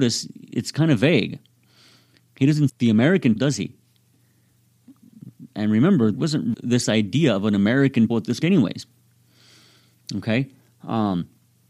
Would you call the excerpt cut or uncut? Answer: cut